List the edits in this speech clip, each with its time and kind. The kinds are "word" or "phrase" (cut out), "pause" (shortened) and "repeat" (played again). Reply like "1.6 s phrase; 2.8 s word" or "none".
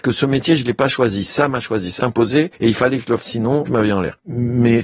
2.0 s word; 3.2 s word; 3.7 s phrase